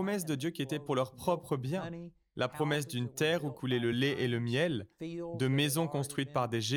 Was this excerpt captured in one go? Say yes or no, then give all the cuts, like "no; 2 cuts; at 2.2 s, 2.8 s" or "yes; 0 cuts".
yes; 0 cuts